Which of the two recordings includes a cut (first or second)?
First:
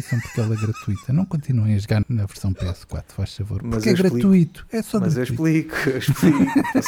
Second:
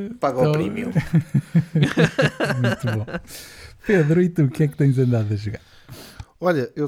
first